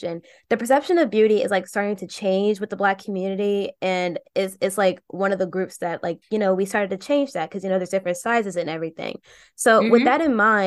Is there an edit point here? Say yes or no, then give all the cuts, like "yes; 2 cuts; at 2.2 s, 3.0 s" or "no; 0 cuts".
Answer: no; 0 cuts